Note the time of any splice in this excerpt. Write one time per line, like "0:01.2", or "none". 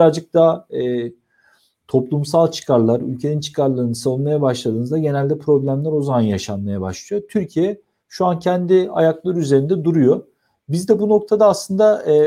none